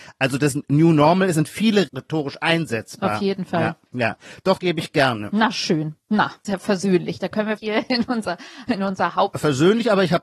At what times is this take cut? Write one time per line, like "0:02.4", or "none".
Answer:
0:01.9
0:03.9
0:04.6
0:06.4
0:07.6